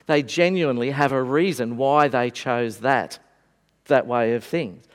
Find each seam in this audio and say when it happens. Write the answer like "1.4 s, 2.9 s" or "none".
none